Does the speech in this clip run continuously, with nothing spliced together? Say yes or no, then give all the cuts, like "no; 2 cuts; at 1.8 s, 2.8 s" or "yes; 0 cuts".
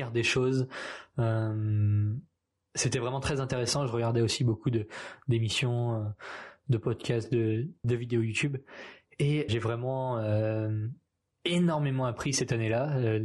no; 2 cuts; at 7.8 s, 9.5 s